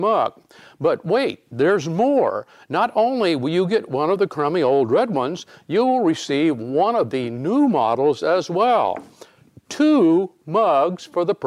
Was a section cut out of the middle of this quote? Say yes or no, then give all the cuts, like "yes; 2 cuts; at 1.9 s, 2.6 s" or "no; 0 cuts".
no; 0 cuts